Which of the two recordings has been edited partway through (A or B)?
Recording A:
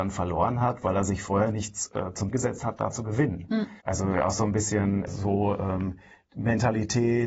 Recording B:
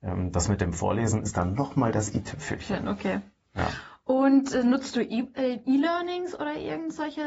A